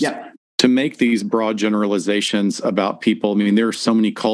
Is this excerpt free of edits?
yes; 0 cuts

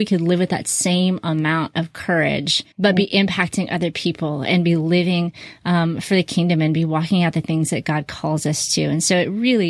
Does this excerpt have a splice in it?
yes; 1 cut; at 2.7 s

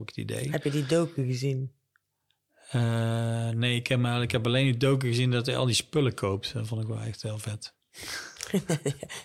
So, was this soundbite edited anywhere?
no; 0 cuts

